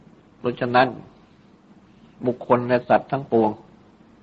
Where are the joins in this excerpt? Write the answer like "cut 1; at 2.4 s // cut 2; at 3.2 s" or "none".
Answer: cut 1; at 2.1 s